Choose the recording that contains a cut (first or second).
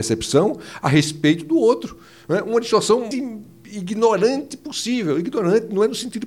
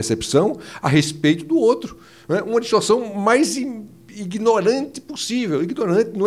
first